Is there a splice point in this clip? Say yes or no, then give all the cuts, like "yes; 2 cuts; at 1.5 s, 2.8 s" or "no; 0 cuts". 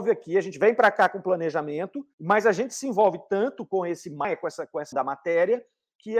yes; 2 cuts; at 2.1 s, 4.9 s